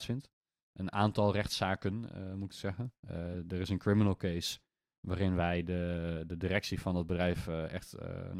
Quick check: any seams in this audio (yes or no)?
no